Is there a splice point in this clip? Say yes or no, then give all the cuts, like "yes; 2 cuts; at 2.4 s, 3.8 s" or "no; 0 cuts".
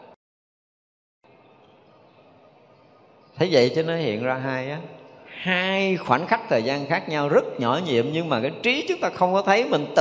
no; 0 cuts